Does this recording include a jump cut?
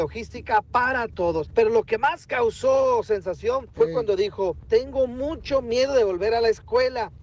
no; 0 cuts

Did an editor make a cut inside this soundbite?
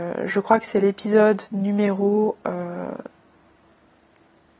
yes; 1 cut; at 1.5 s

